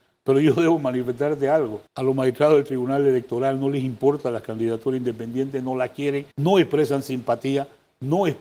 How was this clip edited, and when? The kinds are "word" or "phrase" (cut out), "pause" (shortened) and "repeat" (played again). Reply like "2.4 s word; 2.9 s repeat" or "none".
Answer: 1.9 s pause; 6.3 s pause